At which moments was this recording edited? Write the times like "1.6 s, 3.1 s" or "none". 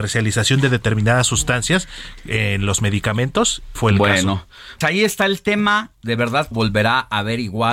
3.7 s, 4.8 s, 5.9 s, 6.5 s